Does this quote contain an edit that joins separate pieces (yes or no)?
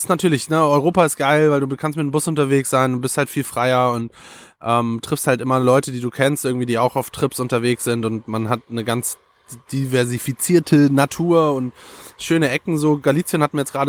no